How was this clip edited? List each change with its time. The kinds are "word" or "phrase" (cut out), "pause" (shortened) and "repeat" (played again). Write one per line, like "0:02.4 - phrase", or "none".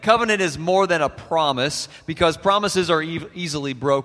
none